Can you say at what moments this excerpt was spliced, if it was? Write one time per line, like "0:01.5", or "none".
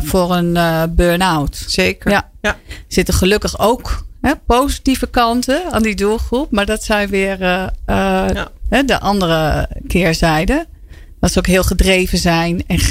none